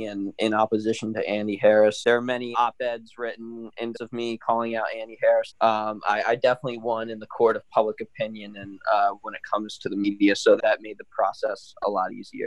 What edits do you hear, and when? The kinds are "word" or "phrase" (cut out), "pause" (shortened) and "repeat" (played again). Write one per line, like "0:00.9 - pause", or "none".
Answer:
0:02.0 - word
0:02.5 - word
0:03.9 - word
0:05.5 - word
0:10.6 - word